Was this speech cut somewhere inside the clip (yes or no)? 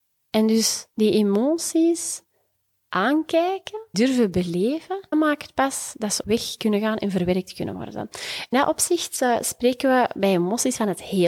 yes